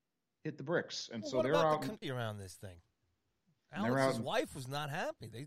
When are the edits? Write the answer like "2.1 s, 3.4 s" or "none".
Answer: 2.0 s